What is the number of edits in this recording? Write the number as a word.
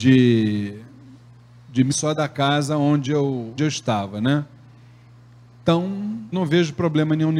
three